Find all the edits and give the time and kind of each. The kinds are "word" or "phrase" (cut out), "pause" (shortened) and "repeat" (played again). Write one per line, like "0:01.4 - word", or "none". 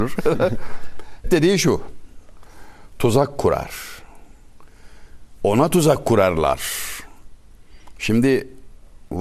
0:01.2 - word